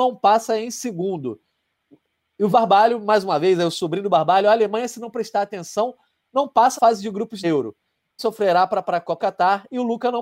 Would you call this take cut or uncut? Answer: cut